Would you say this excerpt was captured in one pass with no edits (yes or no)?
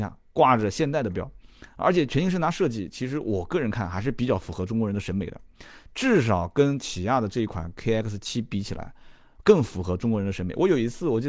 yes